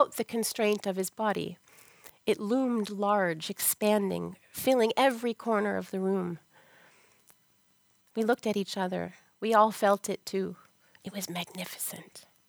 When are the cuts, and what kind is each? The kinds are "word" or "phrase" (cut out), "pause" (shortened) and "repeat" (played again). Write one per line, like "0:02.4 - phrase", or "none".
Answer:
none